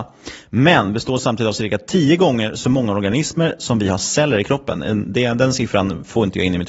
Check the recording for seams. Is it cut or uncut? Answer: uncut